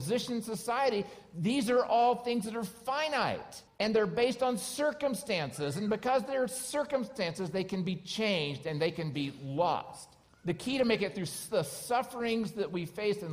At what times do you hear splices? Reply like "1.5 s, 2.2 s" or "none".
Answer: 3.7 s, 10.3 s

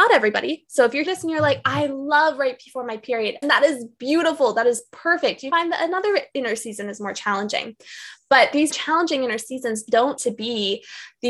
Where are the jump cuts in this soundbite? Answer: 1.1 s, 3.4 s, 5.5 s, 8.7 s, 10.2 s

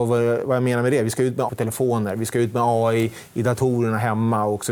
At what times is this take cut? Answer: 1.5 s

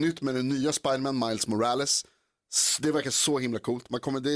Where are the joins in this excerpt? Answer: none

